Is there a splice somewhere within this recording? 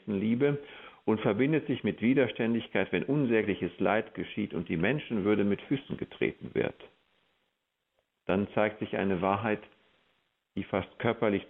no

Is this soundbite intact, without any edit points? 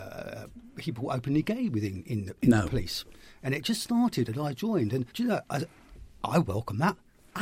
no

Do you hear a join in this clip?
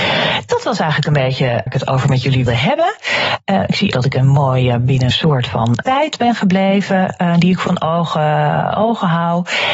yes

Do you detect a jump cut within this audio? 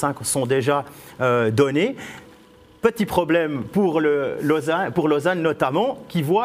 no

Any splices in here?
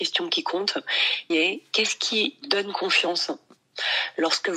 yes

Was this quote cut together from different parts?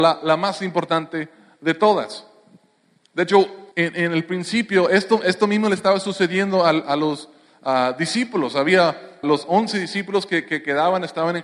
yes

